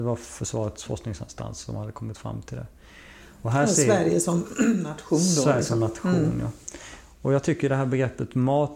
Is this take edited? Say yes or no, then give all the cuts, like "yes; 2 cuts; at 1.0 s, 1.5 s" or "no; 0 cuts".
no; 0 cuts